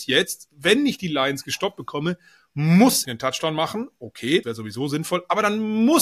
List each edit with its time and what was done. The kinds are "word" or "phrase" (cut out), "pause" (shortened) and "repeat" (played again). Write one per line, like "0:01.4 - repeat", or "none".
0:03.0 - word
0:04.4 - word